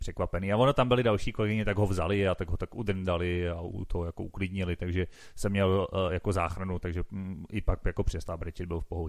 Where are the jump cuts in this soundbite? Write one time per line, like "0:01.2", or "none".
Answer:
0:03.7